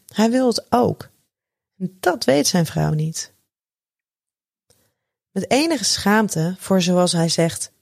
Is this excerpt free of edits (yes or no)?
yes